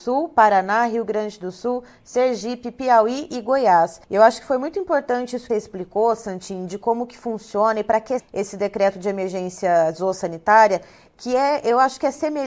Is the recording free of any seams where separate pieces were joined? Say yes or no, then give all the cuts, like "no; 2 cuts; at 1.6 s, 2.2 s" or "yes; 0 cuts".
no; 3 cuts; at 4.0 s, 5.5 s, 8.2 s